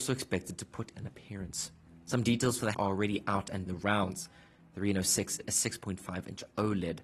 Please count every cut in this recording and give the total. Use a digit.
4